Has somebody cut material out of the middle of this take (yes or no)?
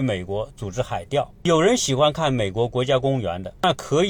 yes